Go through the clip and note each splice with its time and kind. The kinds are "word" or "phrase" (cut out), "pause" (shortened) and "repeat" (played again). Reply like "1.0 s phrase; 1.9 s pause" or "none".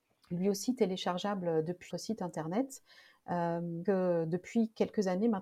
1.9 s word; 3.8 s word